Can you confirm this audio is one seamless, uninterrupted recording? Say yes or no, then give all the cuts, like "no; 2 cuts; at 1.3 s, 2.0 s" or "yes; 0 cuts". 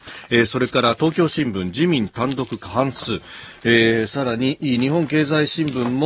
yes; 0 cuts